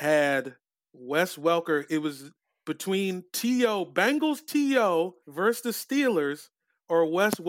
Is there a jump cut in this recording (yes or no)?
yes